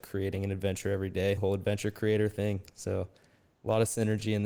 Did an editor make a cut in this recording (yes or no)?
yes